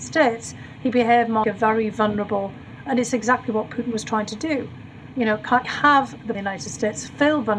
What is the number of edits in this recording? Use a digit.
3